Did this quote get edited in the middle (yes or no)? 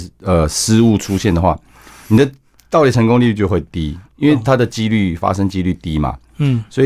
no